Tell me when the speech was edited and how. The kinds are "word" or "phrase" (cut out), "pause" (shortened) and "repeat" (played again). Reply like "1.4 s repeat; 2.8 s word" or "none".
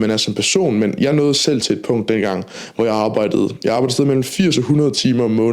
none